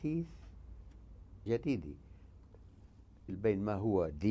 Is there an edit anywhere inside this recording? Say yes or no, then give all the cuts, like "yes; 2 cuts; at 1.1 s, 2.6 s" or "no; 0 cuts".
yes; 2 cuts; at 1.5 s, 3.3 s